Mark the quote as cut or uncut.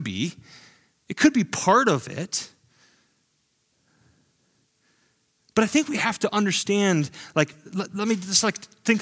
uncut